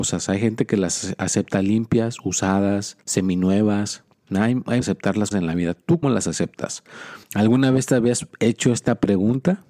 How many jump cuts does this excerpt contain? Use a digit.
5